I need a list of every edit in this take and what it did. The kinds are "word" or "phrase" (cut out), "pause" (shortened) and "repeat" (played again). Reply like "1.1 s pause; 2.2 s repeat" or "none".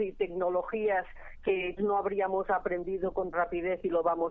1.8 s word; 3.3 s word